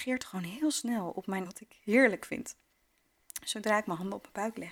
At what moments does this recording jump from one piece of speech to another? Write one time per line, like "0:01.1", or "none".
0:01.4